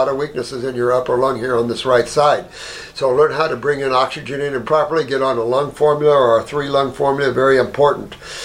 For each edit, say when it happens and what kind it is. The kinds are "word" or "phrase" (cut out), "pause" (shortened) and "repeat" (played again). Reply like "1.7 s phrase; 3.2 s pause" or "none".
4.6 s word